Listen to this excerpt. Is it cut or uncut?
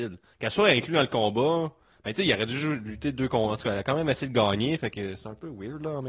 uncut